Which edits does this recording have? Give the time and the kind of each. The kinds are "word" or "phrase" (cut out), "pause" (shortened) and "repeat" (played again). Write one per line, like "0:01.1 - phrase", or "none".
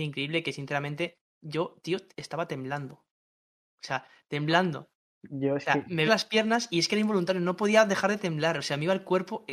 0:05.0 - pause
0:06.1 - word